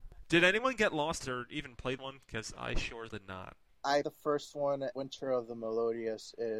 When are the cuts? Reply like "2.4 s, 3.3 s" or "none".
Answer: 1.2 s, 2.0 s, 3.1 s, 4.0 s, 4.9 s

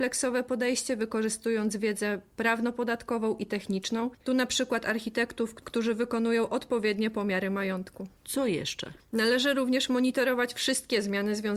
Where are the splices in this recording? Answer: 4.2 s, 8.2 s, 9.0 s

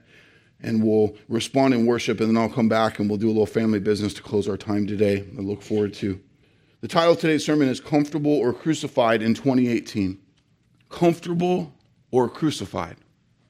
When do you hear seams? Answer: 6.4 s, 10.7 s

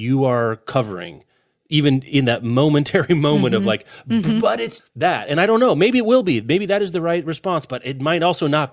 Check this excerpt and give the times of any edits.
4.8 s

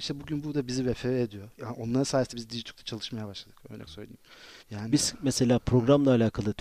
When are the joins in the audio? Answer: 1.5 s, 2.3 s, 3.9 s, 4.6 s

